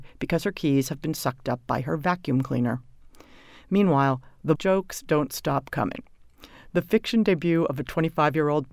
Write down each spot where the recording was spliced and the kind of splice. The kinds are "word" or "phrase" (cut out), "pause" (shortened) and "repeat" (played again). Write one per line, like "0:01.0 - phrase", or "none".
0:04.5 - word